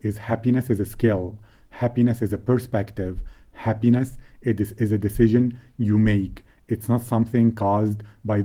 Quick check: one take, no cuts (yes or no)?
yes